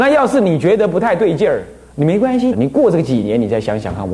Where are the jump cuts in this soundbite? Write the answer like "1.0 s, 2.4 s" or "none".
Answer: 2.5 s